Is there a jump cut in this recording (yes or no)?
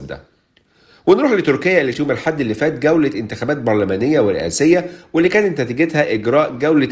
yes